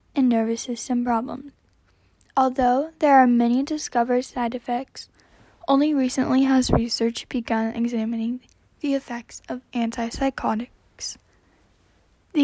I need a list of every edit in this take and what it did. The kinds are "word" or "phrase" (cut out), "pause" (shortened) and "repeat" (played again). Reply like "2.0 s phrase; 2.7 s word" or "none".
none